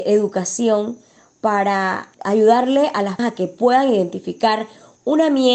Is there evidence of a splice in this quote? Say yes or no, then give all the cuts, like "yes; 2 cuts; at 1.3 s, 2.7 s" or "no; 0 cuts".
yes; 2 cuts; at 2.1 s, 3.2 s